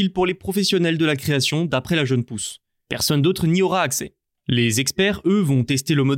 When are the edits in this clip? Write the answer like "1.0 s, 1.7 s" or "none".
none